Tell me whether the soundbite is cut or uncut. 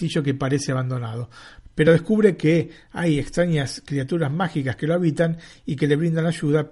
uncut